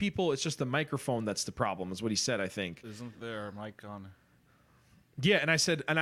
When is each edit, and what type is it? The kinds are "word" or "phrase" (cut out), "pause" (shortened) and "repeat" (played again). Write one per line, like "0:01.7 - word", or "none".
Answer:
none